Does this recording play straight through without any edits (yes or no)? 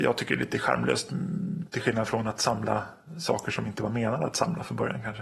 yes